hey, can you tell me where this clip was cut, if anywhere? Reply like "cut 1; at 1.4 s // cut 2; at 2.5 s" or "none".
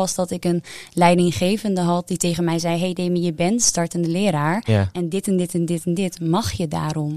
none